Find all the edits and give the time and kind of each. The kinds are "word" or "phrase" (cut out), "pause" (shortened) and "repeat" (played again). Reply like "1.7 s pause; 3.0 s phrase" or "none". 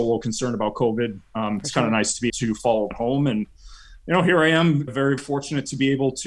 2.3 s word; 2.9 s word; 4.9 s word; 5.2 s word